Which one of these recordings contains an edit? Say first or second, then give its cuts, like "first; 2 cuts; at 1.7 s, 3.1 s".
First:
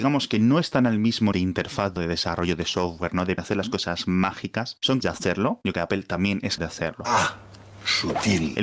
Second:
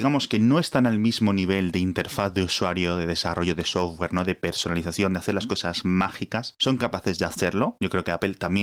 first; 6 cuts; at 1.3 s, 2.0 s, 3.4 s, 5.0 s, 5.7 s, 6.6 s